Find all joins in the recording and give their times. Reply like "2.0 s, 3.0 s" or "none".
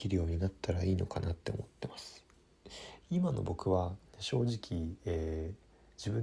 4.1 s